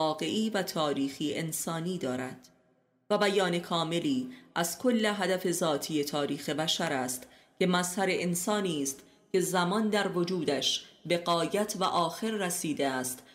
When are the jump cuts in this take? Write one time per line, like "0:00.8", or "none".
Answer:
none